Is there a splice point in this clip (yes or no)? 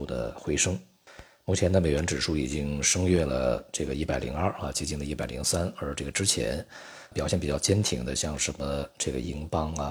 yes